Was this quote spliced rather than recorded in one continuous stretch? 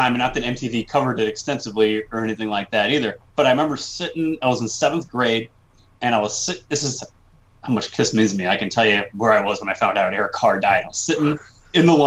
yes; 1 cut; at 3.2 s

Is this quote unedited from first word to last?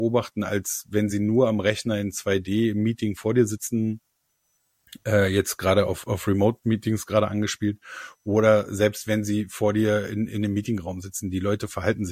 yes; 0 cuts

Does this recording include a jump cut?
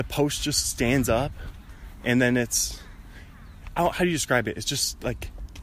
no; 0 cuts

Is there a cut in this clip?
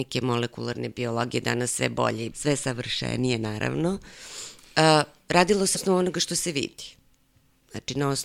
yes; 2 cuts; at 2.3 s, 5.7 s

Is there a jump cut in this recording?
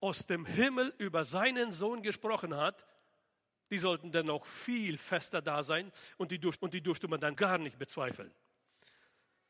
yes; 2 cuts; at 6.6 s, 7.4 s

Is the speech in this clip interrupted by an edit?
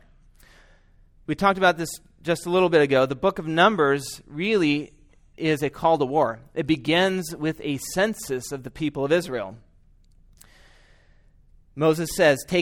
no; 0 cuts

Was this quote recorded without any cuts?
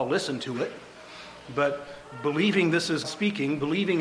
no; 1 cut; at 3.0 s

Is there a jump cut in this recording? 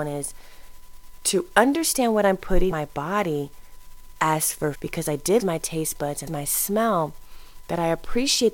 yes; 4 cuts; at 2.7 s, 4.7 s, 5.4 s, 6.3 s

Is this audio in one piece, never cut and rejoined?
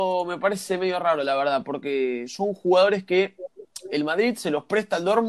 yes; 0 cuts

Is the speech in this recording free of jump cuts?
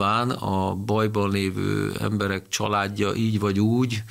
yes; 0 cuts

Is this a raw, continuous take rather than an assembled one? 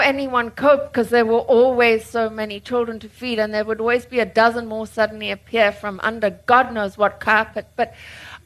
yes; 0 cuts

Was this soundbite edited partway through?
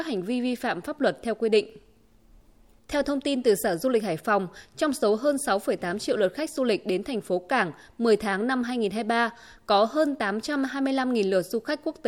no; 0 cuts

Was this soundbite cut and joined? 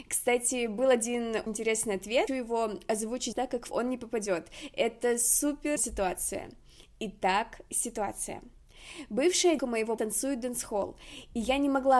yes; 7 cuts; at 1.5 s, 2.3 s, 3.3 s, 3.7 s, 5.8 s, 9.6 s, 10.0 s

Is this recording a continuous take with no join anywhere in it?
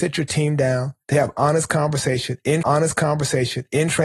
no; 2 cuts; at 1.0 s, 2.6 s

